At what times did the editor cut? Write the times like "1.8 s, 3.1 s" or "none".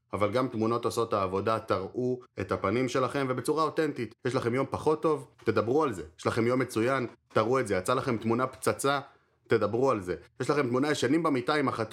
2.3 s, 4.2 s, 5.3 s